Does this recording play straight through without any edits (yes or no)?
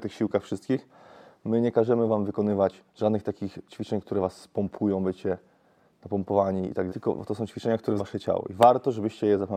no